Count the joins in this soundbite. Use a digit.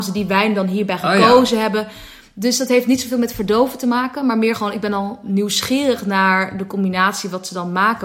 0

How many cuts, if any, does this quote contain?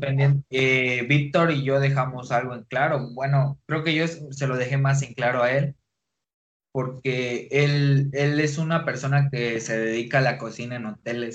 0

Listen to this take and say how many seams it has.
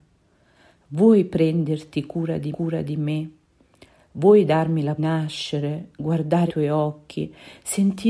3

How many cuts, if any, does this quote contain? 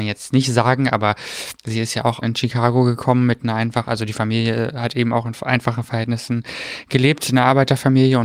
2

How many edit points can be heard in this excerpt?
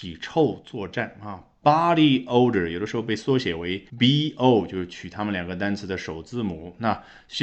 1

